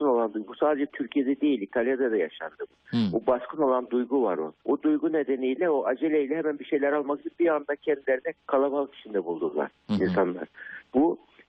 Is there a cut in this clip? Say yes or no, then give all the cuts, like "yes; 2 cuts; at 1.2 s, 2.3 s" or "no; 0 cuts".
yes; 2 cuts; at 4.6 s, 8.4 s